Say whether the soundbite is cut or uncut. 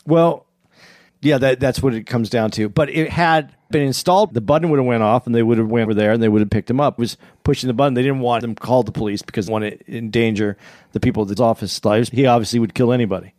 cut